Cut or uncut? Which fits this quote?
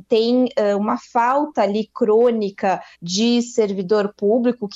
cut